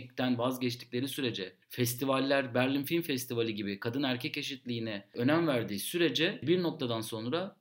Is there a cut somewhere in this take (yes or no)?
yes